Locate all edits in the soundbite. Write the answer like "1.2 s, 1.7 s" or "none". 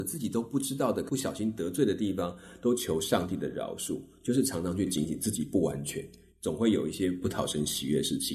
none